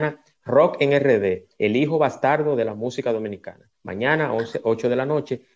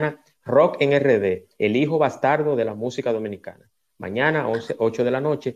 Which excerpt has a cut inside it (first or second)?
first